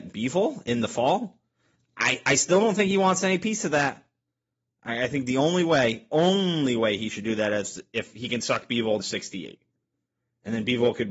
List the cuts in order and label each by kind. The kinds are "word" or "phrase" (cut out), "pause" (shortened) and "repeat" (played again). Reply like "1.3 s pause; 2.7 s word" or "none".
9.0 s word